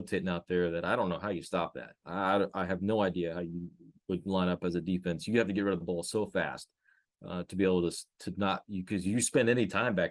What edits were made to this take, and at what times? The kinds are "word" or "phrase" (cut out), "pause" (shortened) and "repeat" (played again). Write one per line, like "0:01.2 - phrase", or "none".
none

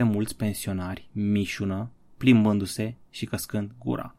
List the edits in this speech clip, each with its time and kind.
0:02.1 - phrase

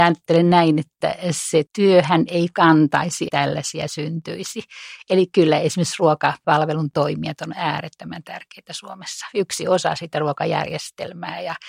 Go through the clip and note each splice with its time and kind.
0:01.7 - pause
0:03.3 - word

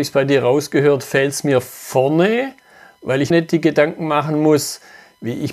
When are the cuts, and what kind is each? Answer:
0:03.3 - phrase

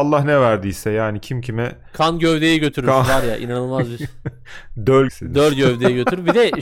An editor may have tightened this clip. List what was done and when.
0:05.1 - phrase

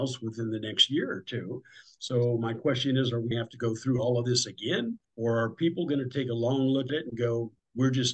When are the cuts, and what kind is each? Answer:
0:03.3 - word
0:05.0 - pause
0:06.9 - word

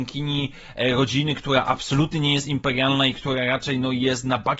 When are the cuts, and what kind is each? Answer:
none

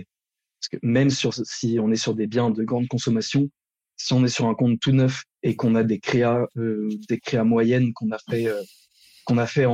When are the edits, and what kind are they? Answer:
0:05.3 - pause

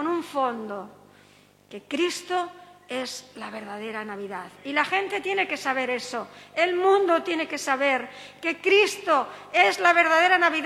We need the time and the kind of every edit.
none

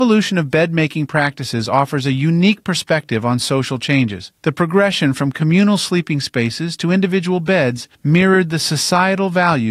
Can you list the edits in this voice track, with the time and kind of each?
0:04.4 - pause
0:07.9 - pause

